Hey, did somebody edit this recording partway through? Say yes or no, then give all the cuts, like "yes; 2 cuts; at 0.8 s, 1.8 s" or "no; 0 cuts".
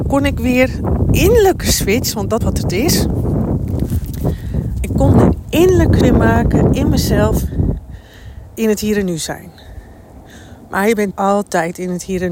yes; 5 cuts; at 1.1 s, 2.4 s, 6.0 s, 8.5 s, 11.1 s